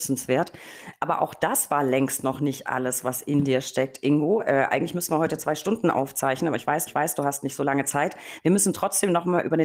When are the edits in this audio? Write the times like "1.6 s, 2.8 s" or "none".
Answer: 6.9 s